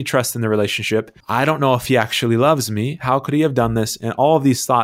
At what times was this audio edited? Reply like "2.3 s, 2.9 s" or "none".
1.2 s